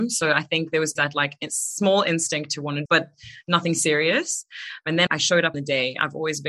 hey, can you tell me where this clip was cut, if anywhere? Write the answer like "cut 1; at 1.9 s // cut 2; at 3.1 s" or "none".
cut 1; at 1.0 s // cut 2; at 2.9 s // cut 3; at 5.1 s // cut 4; at 5.5 s